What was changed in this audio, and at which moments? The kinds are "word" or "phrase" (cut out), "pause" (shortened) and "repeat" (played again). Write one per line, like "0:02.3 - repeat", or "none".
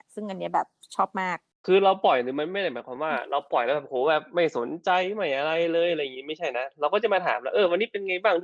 none